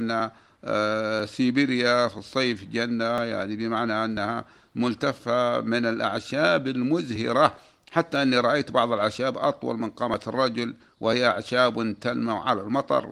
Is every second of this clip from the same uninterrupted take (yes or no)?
yes